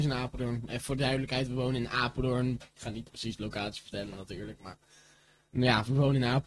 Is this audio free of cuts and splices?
yes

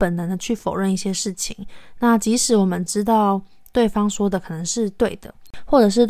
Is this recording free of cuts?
yes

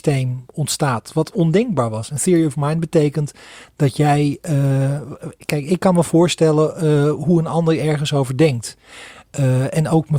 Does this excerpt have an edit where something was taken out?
no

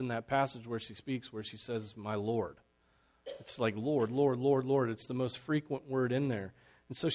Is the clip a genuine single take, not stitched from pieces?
yes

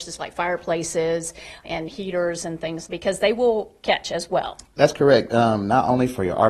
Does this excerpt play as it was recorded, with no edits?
no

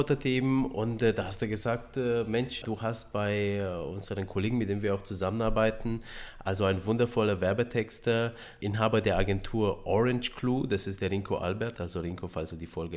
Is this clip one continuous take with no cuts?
yes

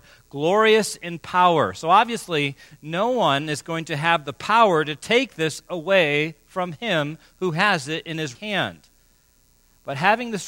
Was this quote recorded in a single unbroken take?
no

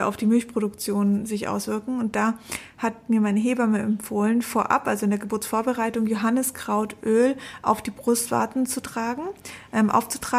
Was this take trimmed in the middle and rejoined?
no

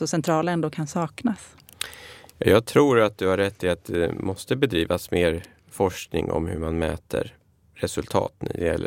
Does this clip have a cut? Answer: no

